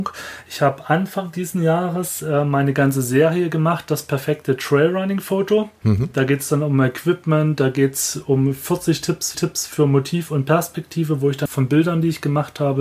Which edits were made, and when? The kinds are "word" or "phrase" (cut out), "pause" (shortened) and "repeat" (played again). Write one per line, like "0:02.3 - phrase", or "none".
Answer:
0:09.3 - repeat
0:11.5 - word